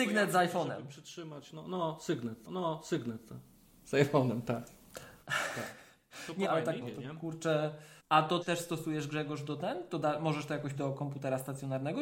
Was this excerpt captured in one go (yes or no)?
no